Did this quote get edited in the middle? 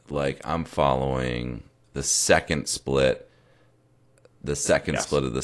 yes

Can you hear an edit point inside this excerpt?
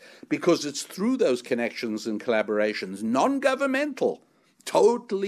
no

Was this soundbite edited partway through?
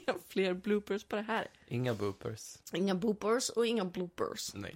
yes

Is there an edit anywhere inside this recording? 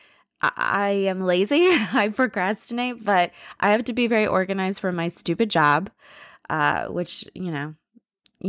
no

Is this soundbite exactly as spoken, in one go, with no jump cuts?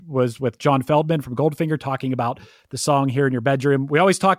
yes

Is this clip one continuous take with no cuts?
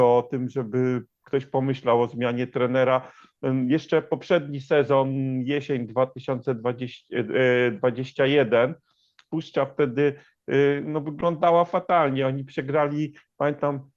yes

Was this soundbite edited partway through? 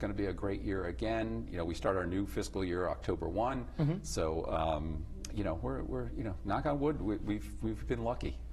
no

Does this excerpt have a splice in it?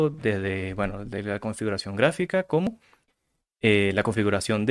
no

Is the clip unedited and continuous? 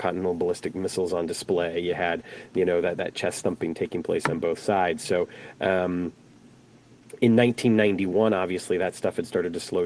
yes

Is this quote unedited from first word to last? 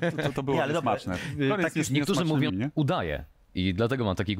no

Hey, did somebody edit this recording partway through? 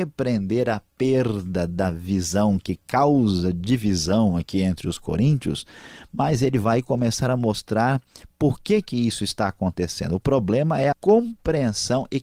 yes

